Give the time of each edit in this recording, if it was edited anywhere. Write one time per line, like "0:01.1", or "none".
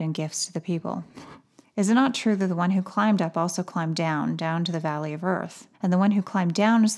0:01.6
0:05.7